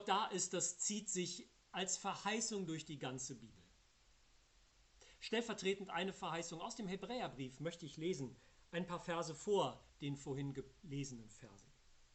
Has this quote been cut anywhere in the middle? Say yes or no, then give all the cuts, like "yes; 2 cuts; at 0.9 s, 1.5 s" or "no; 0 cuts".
yes; 1 cut; at 9.9 s